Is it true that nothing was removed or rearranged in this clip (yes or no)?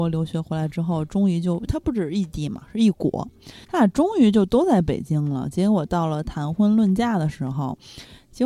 no